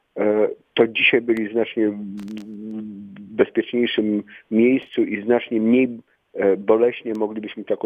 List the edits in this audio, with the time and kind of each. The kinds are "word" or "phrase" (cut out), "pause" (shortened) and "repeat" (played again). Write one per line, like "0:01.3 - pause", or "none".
0:01.2 - word